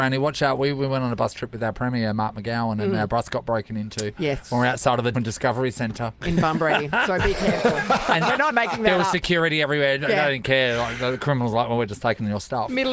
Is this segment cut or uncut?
cut